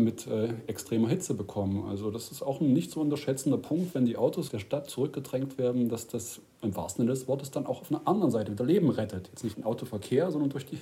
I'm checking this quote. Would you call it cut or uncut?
cut